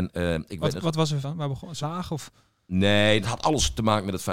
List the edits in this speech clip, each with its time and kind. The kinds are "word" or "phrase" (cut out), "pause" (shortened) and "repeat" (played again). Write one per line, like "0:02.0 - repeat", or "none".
0:01.2 - word
0:01.8 - word
0:03.2 - phrase